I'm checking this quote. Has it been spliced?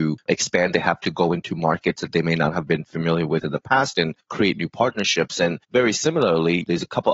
no; 0 cuts

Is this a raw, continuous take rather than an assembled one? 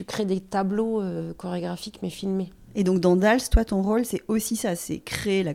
yes; 0 cuts

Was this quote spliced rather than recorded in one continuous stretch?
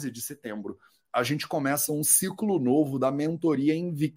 no; 0 cuts

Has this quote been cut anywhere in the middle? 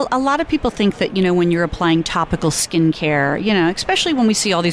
no; 0 cuts

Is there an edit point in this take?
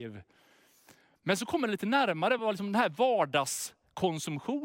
no; 0 cuts

